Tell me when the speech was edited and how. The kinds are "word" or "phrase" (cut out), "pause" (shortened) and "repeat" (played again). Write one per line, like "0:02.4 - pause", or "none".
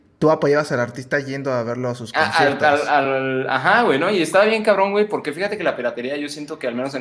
none